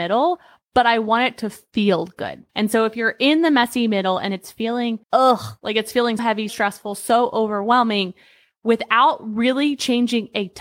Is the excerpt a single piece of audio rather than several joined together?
no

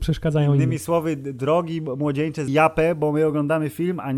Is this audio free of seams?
no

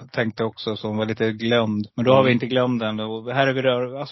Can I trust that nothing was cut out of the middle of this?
no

